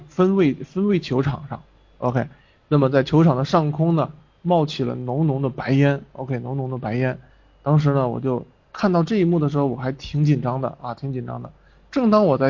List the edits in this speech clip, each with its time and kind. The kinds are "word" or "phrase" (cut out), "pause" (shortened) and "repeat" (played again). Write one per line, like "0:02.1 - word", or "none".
none